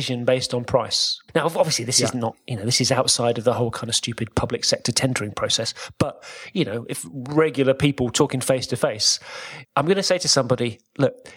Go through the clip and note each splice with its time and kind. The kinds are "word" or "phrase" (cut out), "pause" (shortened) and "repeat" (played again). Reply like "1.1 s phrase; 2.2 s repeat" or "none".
1.3 s pause; 9.6 s pause